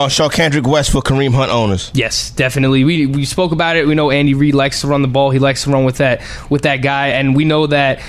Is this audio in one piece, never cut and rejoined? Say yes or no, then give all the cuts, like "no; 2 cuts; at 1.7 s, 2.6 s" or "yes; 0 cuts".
yes; 0 cuts